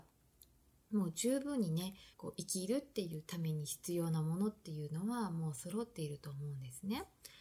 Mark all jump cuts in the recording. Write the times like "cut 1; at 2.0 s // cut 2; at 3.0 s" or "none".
cut 1; at 2.1 s